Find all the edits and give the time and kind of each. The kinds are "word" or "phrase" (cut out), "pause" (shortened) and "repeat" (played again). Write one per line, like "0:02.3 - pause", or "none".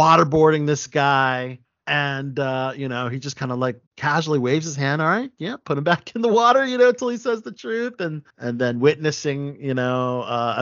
0:01.6 - pause
0:03.9 - pause
0:08.3 - pause